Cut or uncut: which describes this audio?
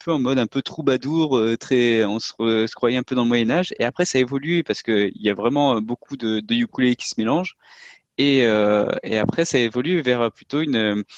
uncut